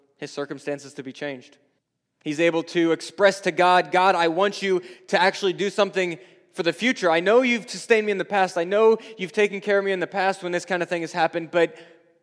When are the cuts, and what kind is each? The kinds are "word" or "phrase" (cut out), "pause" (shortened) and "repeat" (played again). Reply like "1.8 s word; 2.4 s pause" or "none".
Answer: 1.8 s pause